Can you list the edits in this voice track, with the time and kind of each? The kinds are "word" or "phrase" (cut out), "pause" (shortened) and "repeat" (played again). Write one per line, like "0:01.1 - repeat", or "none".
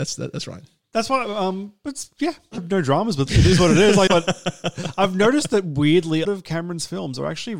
0:02.6 - word
0:03.3 - word
0:04.1 - word
0:06.2 - word